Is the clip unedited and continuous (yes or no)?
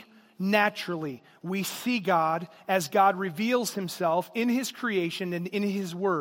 yes